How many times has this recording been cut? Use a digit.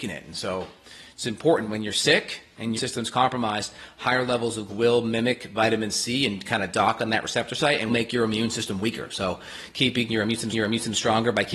4